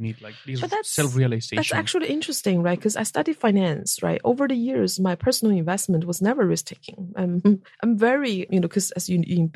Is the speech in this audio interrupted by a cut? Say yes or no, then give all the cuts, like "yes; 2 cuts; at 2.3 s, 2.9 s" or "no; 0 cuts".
yes; 1 cut; at 7.7 s